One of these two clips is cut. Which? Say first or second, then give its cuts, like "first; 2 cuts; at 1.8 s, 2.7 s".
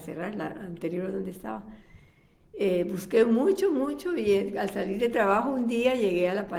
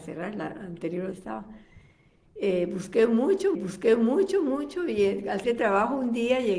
second; 3 cuts; at 1.1 s, 3.5 s, 5.4 s